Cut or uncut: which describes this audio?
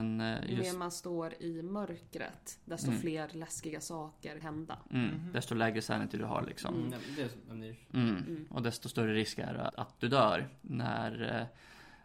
cut